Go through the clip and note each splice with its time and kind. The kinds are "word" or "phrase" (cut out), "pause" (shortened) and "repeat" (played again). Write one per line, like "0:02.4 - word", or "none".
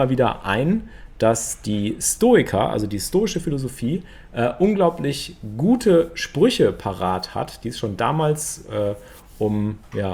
none